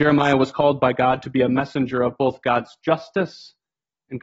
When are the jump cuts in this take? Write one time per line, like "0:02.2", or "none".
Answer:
none